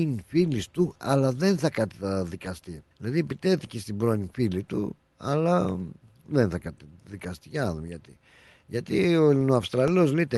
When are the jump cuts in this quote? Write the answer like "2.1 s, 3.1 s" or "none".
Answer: 2.9 s

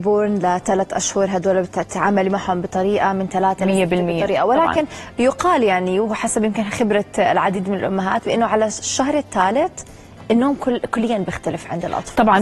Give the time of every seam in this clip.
none

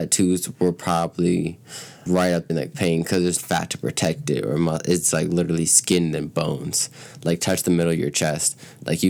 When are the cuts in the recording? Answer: 2.1 s, 2.5 s, 3.4 s, 5.1 s

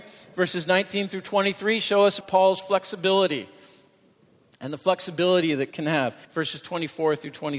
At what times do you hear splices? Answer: 2.2 s, 5.7 s, 6.2 s

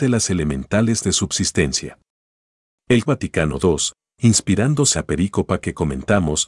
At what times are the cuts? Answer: 1.0 s, 3.1 s, 4.9 s

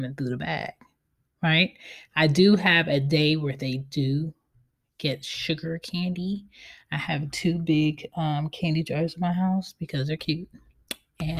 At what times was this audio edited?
none

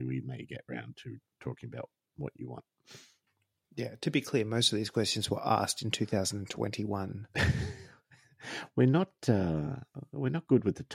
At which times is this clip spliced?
none

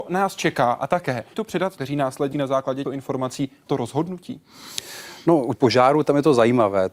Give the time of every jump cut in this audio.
1.3 s, 1.8 s, 2.3 s, 2.8 s, 3.7 s, 5.5 s

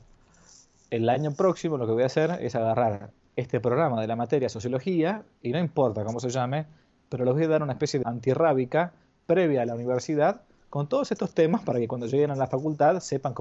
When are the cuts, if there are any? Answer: 8.0 s

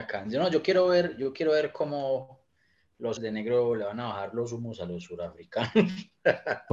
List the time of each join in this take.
3.2 s

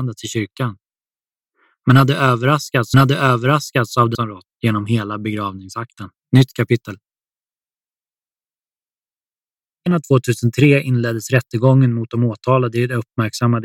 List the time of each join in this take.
2.9 s, 4.1 s, 4.5 s, 6.2 s, 9.9 s

